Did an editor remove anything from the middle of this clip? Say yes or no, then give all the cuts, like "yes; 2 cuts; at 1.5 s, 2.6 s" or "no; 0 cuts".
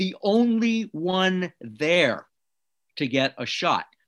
no; 0 cuts